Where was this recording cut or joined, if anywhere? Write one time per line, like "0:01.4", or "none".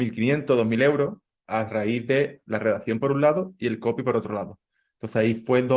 none